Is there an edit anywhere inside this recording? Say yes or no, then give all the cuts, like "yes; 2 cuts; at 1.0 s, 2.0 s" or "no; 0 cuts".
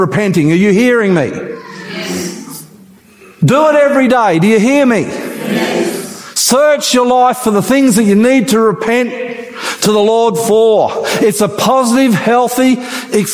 no; 0 cuts